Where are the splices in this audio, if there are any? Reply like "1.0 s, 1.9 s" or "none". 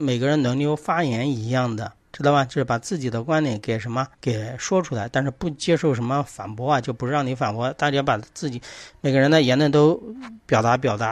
4.1 s